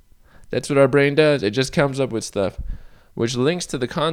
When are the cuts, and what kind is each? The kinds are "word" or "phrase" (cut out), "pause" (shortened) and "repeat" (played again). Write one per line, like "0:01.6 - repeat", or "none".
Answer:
none